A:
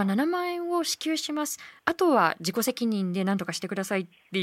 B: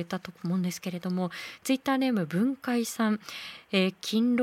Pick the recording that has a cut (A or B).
A